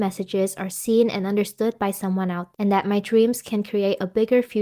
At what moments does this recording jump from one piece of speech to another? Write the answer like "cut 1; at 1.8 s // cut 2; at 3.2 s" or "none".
cut 1; at 2.5 s